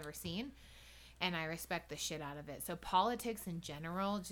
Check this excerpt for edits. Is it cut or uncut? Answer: uncut